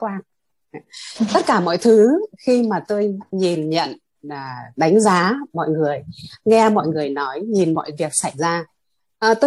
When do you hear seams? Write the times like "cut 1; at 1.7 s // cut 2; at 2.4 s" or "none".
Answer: none